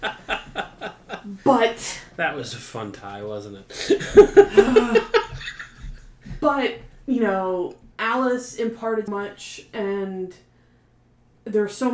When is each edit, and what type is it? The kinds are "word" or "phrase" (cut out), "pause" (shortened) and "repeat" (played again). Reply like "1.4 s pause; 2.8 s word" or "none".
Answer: 7.9 s pause; 9.1 s word